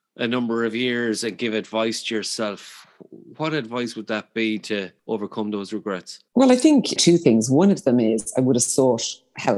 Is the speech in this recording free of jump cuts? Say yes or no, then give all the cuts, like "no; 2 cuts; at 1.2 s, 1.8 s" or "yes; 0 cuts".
no; 3 cuts; at 5.0 s, 6.3 s, 7.0 s